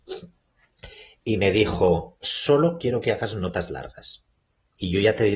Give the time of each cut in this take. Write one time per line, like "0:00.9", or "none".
0:02.2